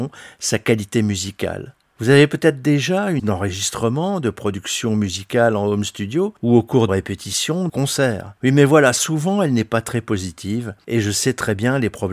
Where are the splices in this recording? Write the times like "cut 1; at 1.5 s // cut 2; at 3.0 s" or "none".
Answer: cut 1; at 3.2 s // cut 2; at 6.9 s // cut 3; at 7.7 s // cut 4; at 8.4 s